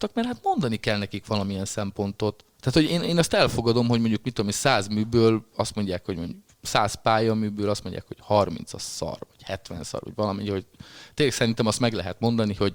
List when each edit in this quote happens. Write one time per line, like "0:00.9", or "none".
0:02.5